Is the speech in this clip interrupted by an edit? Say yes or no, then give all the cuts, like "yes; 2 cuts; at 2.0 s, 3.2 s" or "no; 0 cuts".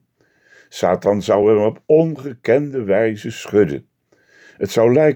no; 0 cuts